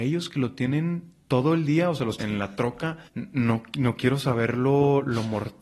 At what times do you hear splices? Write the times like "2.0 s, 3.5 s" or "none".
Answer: 2.2 s, 3.1 s